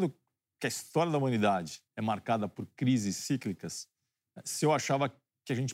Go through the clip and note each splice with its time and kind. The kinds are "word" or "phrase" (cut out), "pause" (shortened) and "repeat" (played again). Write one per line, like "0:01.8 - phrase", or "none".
0:01.9 - pause